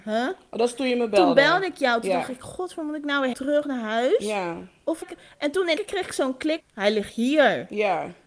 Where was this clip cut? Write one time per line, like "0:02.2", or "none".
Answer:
0:03.3
0:05.0
0:05.8
0:06.6

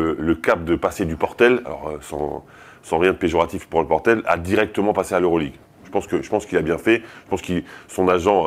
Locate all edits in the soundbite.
none

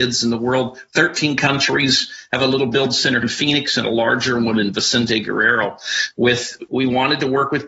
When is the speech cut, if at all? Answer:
0:03.2
0:06.7

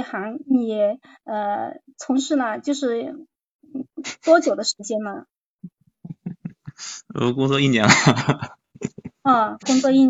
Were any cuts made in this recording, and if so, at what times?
none

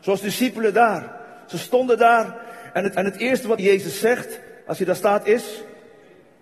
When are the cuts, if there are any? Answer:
0:03.0
0:03.6
0:04.6

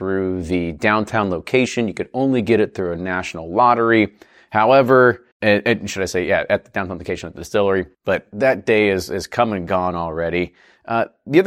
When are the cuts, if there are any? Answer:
0:05.3
0:07.9

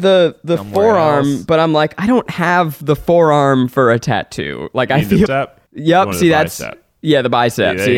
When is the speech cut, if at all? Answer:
0:05.3
0:05.7

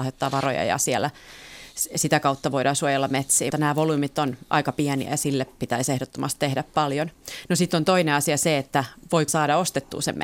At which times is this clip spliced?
0:03.5
0:09.3

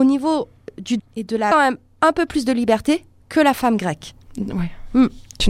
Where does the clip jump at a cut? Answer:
0:01.0
0:01.5

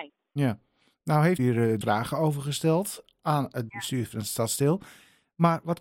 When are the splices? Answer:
0:01.4
0:01.8
0:03.7

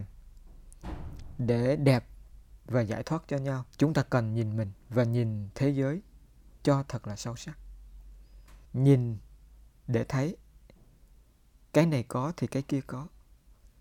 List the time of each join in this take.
0:03.7
0:04.8
0:08.6

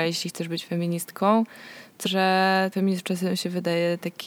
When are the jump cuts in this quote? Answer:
0:02.1
0:02.7

